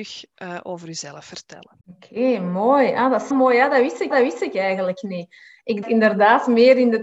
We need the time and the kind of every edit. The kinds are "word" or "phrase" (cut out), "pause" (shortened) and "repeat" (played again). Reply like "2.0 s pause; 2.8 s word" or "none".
1.8 s pause; 3.3 s word; 4.1 s repeat; 5.8 s word